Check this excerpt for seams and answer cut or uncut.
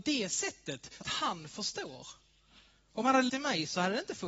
cut